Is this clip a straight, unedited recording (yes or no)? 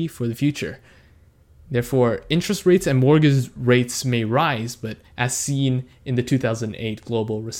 no